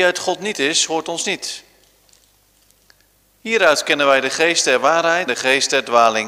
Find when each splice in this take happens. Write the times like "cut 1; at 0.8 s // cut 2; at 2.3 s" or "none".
cut 1; at 5.3 s